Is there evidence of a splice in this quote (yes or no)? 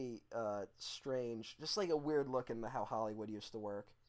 no